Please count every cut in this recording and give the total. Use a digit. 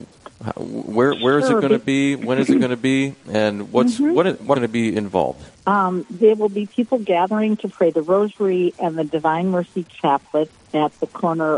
2